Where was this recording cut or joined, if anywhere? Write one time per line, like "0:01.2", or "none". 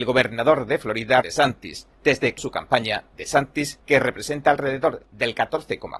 0:01.2
0:01.9
0:02.4
0:03.8